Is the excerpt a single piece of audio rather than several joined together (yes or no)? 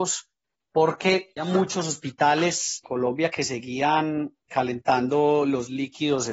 no